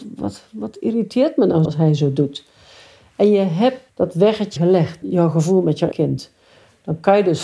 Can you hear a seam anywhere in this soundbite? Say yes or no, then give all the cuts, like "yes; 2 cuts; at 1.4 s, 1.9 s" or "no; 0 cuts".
yes; 5 cuts; at 1.6 s, 3.9 s, 4.6 s, 5.0 s, 5.9 s